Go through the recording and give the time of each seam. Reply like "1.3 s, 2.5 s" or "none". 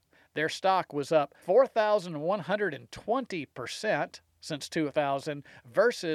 1.4 s

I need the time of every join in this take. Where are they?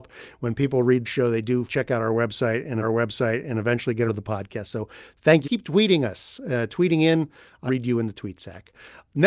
1.1 s, 1.7 s, 2.8 s, 4.1 s, 5.4 s, 7.7 s

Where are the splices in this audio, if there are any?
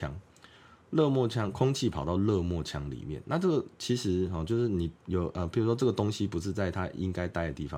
5.0 s

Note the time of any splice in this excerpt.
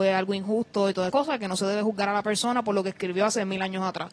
1.1 s

